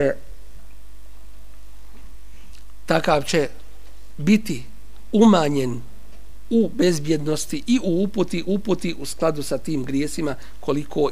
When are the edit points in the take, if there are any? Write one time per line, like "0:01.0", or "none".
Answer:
0:08.5